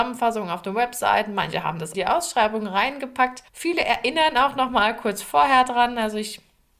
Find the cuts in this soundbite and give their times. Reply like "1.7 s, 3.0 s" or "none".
1.9 s, 3.5 s